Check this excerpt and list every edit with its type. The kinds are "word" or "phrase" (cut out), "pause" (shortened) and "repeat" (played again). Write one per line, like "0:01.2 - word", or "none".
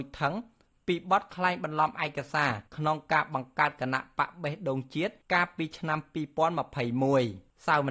0:02.7 - pause
0:05.2 - pause